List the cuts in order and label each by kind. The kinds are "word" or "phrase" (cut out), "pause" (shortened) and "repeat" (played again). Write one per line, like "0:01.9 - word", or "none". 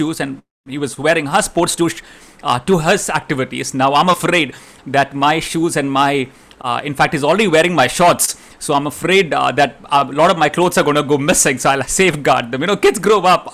0:11.8 - phrase